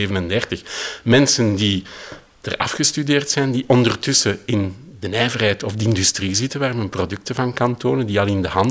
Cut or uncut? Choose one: uncut